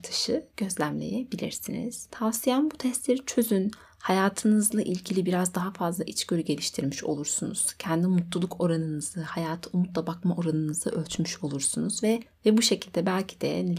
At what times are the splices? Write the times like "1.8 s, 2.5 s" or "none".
none